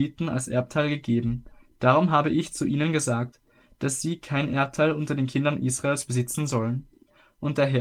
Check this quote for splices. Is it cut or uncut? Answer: uncut